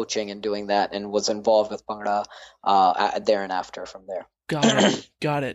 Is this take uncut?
yes; 0 cuts

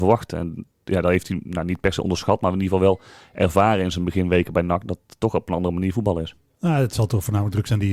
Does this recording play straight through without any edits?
yes; 0 cuts

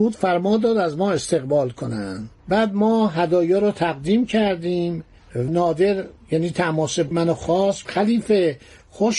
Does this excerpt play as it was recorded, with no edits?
no; 4 cuts; at 2.4 s, 5.5 s, 7.1 s, 7.8 s

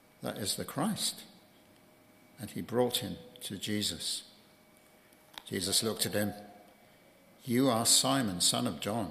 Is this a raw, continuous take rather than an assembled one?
yes; 0 cuts

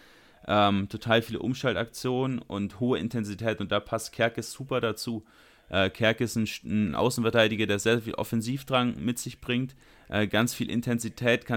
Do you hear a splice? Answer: no; 0 cuts

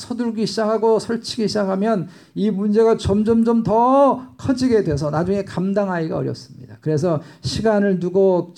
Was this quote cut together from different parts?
no; 0 cuts

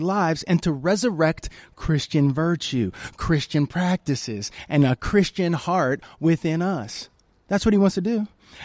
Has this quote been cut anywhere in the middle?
no; 0 cuts

